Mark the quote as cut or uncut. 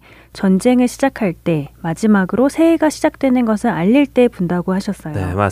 uncut